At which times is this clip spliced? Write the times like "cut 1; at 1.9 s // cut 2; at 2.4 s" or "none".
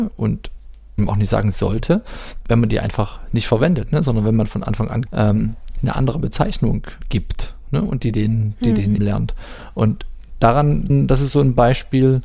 cut 1; at 2.4 s // cut 2; at 5.1 s // cut 3; at 7.0 s // cut 4; at 9.0 s // cut 5; at 10.9 s